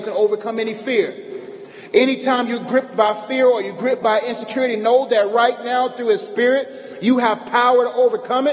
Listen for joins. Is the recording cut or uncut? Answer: uncut